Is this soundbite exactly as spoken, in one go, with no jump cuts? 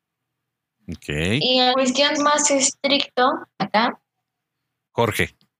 no; 3 cuts; at 1.7 s, 2.1 s, 3.5 s

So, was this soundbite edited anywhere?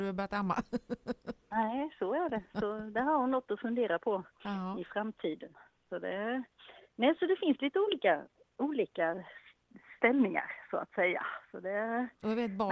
no; 0 cuts

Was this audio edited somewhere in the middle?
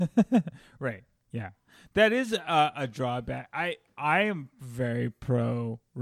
no; 0 cuts

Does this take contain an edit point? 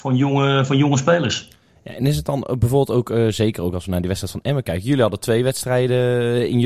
no; 0 cuts

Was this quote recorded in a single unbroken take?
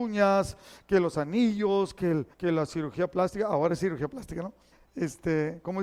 no; 1 cut; at 2.3 s

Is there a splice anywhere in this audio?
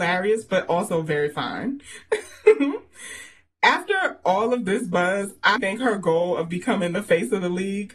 yes; 1 cut; at 5.6 s

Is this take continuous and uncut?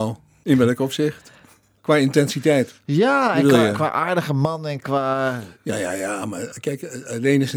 yes; 0 cuts

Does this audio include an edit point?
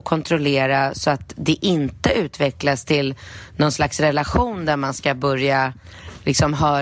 no; 0 cuts

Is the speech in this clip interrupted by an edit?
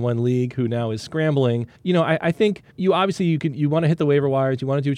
yes; 2 cuts; at 1.7 s, 2.7 s

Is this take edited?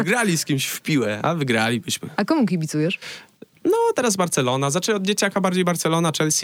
no; 0 cuts

